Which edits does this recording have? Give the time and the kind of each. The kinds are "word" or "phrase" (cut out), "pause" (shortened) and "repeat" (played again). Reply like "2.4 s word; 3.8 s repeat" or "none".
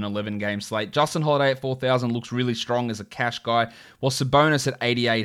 none